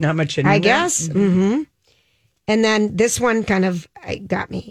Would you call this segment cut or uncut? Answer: uncut